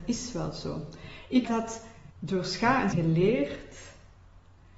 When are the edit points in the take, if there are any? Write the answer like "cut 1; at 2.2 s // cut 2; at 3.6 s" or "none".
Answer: cut 1; at 1.4 s // cut 2; at 2.1 s // cut 3; at 2.9 s